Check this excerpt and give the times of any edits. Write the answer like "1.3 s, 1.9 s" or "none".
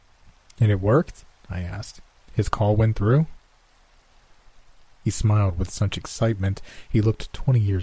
none